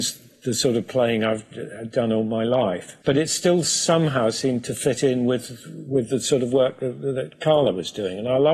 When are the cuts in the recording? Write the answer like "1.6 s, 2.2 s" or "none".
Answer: 3.0 s